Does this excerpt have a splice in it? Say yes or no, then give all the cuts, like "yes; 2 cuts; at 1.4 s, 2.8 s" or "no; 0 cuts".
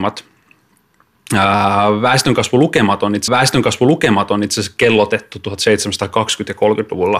yes; 1 cut; at 3.3 s